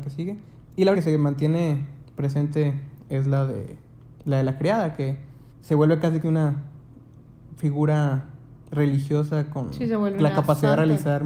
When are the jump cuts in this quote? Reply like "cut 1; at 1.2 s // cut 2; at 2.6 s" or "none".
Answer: cut 1; at 0.9 s // cut 2; at 5.5 s // cut 3; at 6.2 s